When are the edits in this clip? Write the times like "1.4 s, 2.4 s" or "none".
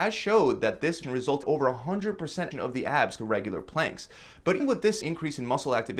1.0 s, 1.4 s, 2.5 s, 3.2 s, 4.6 s, 5.0 s